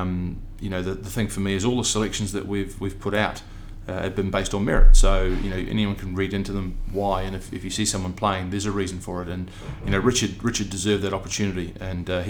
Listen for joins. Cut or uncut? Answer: uncut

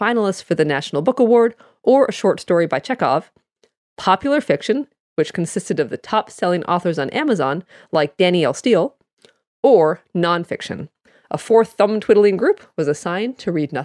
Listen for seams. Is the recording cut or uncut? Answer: uncut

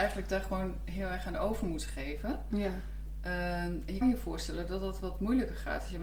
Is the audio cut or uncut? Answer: cut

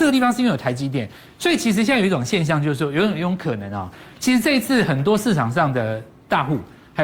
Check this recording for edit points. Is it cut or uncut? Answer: uncut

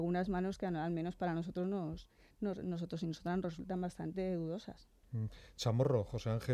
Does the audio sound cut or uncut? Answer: uncut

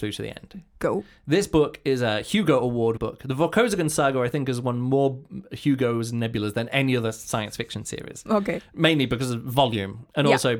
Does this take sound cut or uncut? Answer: cut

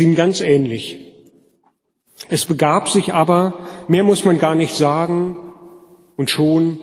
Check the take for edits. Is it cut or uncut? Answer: uncut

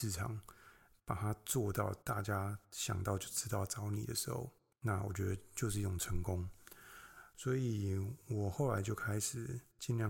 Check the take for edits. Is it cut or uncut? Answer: cut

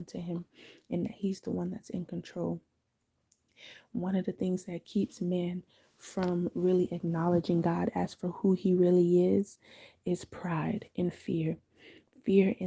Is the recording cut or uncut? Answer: uncut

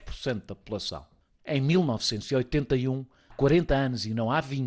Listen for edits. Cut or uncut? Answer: cut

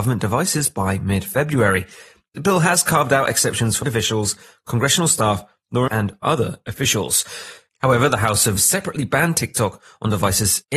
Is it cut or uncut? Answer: cut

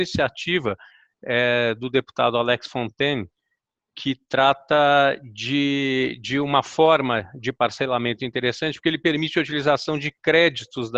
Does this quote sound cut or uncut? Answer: uncut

